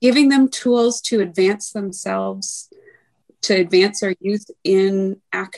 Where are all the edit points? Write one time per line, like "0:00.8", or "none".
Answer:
none